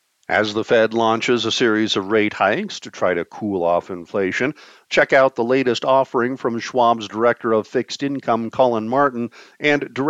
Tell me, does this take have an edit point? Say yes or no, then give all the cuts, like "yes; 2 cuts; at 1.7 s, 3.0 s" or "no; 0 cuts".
no; 0 cuts